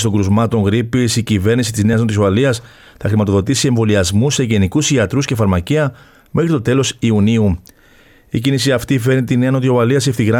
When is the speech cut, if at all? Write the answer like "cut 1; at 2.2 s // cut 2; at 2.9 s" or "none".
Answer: none